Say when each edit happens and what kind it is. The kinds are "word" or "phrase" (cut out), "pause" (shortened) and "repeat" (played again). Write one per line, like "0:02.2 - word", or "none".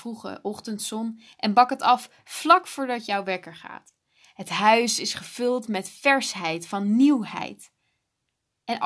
none